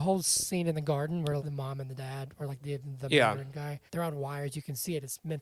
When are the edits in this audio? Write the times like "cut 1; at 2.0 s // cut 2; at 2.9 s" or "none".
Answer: cut 1; at 1.4 s // cut 2; at 3.9 s